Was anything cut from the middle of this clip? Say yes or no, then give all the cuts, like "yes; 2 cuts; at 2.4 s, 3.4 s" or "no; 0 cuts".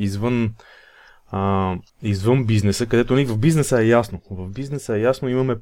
yes; 1 cut; at 1.9 s